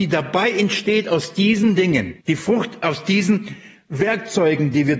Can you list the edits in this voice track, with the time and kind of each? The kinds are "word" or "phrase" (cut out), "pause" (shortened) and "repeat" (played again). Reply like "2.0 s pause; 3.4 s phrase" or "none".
2.2 s pause